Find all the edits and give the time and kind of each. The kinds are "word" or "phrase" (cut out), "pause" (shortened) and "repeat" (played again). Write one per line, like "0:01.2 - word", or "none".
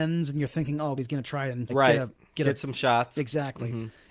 0:01.0 - word
0:01.7 - phrase